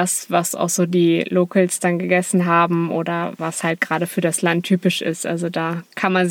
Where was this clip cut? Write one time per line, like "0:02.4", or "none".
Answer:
none